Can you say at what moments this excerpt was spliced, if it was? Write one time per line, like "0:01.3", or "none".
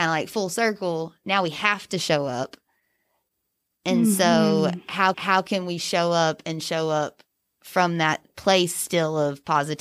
0:05.1
0:07.5